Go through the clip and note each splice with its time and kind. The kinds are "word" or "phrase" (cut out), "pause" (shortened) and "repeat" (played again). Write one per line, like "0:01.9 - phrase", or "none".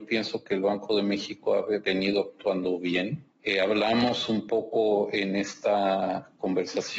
none